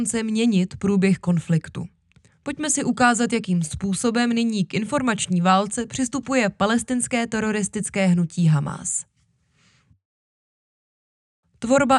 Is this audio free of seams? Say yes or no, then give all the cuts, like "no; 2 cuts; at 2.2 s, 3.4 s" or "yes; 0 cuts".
yes; 0 cuts